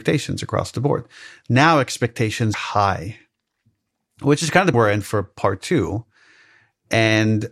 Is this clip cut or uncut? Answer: cut